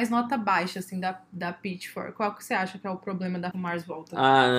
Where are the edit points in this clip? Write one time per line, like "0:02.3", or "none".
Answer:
0:03.5

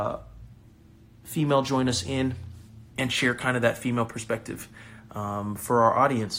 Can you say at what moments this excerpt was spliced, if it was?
0:02.9

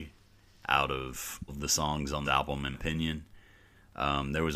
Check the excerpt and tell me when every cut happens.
0:01.5
0:02.2
0:02.7

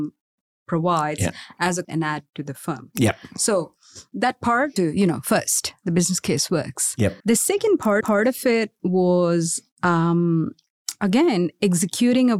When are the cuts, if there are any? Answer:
0:01.8
0:04.8
0:07.2
0:08.0
0:08.8

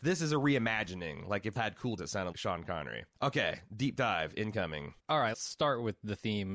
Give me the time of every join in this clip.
0:01.6
0:02.0
0:02.3
0:03.1
0:05.0
0:05.3

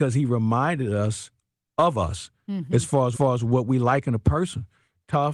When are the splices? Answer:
0:03.1

